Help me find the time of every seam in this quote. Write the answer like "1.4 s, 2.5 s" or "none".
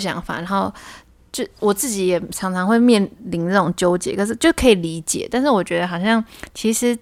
none